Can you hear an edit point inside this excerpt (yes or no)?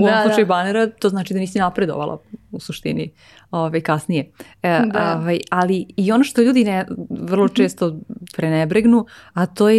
no